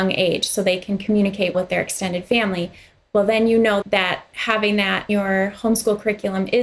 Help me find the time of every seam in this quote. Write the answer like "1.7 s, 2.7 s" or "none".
1.5 s, 3.8 s, 5.1 s